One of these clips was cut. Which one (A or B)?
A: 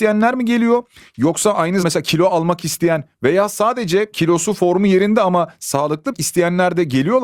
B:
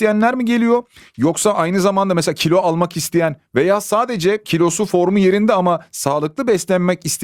A